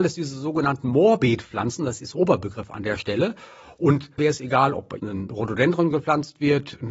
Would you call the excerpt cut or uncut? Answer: cut